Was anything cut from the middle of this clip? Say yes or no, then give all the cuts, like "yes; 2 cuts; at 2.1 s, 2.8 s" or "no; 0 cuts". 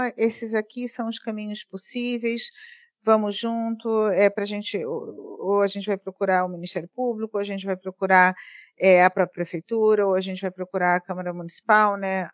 no; 0 cuts